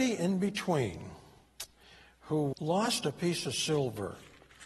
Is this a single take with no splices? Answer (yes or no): no